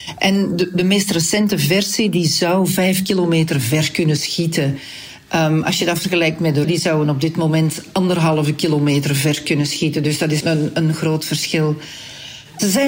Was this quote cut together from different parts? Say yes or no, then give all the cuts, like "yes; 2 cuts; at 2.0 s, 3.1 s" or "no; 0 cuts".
yes; 2 cuts; at 6.6 s, 10.4 s